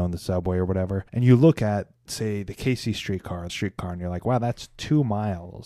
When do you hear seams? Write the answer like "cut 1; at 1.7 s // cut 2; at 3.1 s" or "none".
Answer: cut 1; at 1.1 s // cut 2; at 2.0 s // cut 3; at 3.5 s

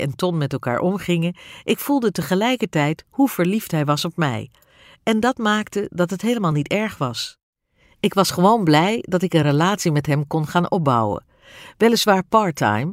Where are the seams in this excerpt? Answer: none

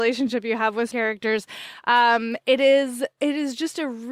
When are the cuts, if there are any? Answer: cut 1; at 0.9 s // cut 2; at 2.4 s

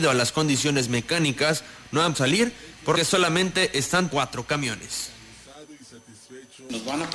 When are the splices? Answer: cut 1; at 2.1 s // cut 2; at 2.9 s // cut 3; at 4.1 s

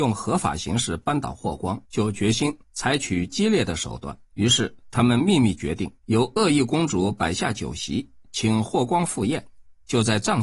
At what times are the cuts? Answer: cut 1; at 1.8 s // cut 2; at 2.6 s // cut 3; at 4.3 s // cut 4; at 6.0 s

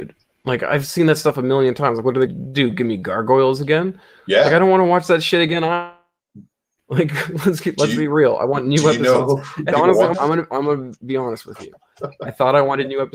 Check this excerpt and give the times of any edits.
cut 1; at 2.3 s // cut 2; at 9.7 s // cut 3; at 10.1 s

